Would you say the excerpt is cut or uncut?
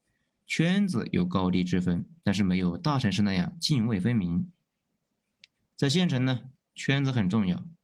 uncut